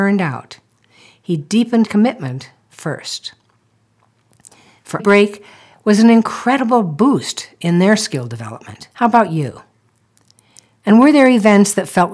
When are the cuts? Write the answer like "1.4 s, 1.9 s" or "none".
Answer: 1.9 s, 5.0 s, 8.9 s